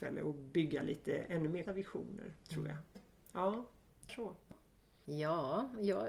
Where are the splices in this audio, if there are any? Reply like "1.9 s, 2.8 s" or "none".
1.7 s, 4.1 s